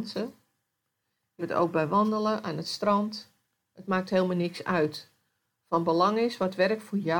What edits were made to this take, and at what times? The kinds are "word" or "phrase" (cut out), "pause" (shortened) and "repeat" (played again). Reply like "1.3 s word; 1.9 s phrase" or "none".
1.4 s word